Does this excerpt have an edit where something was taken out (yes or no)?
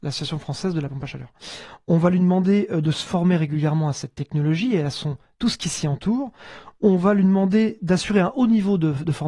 no